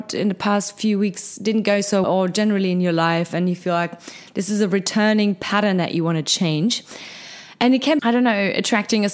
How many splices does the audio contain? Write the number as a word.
two